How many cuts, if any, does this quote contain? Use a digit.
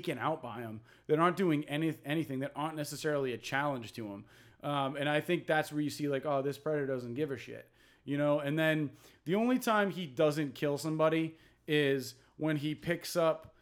0